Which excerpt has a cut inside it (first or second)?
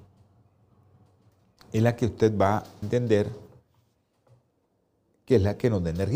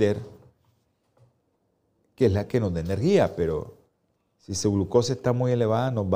first